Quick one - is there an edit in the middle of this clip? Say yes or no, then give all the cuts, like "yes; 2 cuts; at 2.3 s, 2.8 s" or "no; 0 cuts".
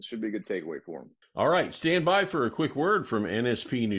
yes; 1 cut; at 1.2 s